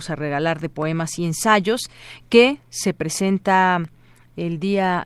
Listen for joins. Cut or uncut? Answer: uncut